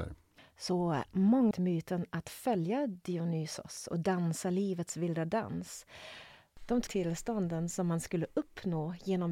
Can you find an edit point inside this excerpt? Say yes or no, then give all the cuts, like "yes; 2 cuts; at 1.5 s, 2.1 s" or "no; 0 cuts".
yes; 2 cuts; at 1.5 s, 6.9 s